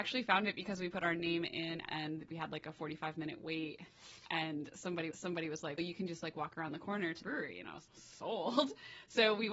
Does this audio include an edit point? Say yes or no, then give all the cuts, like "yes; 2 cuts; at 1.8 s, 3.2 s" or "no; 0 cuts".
yes; 5 cuts; at 1.9 s, 5.1 s, 5.8 s, 7.2 s, 7.9 s